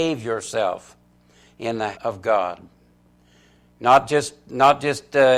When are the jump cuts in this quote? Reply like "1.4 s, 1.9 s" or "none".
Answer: 1.9 s

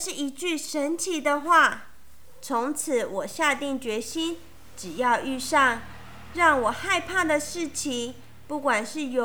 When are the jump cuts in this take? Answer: none

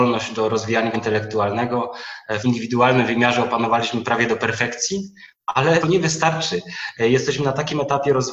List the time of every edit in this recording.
0.9 s, 2.4 s, 5.8 s

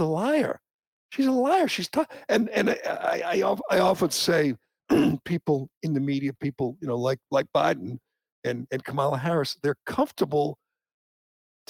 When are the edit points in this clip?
none

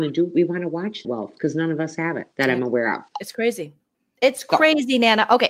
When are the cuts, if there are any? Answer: 1.0 s, 2.3 s, 3.1 s

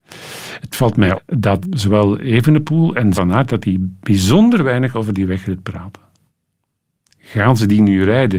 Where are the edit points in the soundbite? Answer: 1.1 s, 1.6 s, 3.1 s

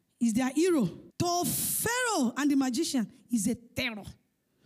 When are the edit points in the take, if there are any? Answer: 1.1 s

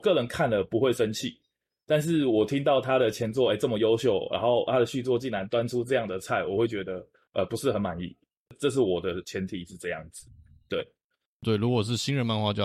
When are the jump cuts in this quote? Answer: none

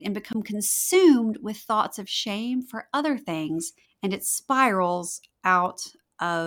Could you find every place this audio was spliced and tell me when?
3.8 s

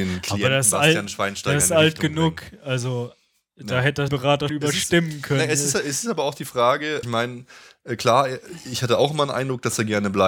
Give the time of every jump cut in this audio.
4.1 s, 4.5 s, 7.0 s

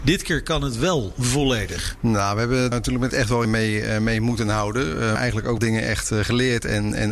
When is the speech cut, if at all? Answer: 2.7 s, 3.1 s, 3.4 s, 5.2 s, 5.6 s

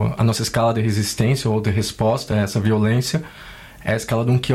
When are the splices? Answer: none

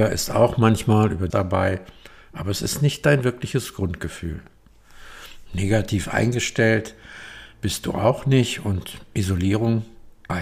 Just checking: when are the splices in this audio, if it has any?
1.3 s

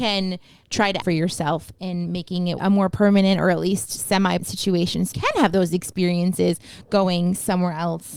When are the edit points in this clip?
1.0 s, 2.6 s, 4.4 s, 5.1 s

